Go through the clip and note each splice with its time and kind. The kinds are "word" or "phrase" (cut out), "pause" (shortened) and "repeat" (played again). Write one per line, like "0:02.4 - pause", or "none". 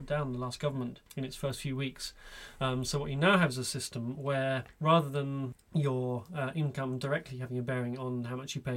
none